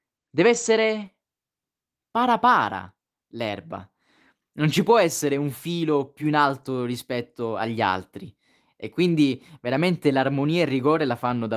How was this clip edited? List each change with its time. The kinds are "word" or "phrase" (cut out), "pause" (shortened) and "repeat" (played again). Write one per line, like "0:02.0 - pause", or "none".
none

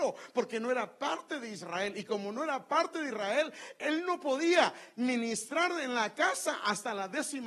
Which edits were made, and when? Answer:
none

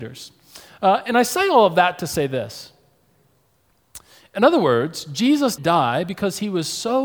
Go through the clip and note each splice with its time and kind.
0:05.6 - word

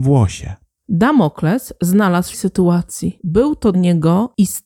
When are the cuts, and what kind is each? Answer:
0:02.3 - phrase
0:03.7 - word

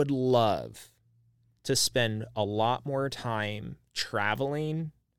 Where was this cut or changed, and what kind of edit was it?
none

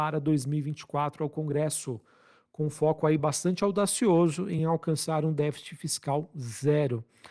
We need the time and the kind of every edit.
none

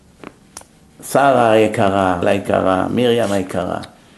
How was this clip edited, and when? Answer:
0:02.2 - word

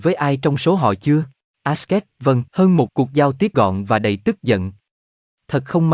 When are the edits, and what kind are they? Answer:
0:01.5 - pause
0:02.5 - pause
0:02.9 - word
0:03.5 - word

